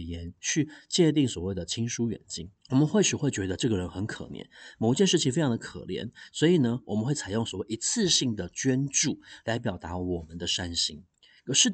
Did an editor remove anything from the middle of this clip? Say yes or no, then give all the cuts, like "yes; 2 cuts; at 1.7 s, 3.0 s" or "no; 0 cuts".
yes; 1 cut; at 2.6 s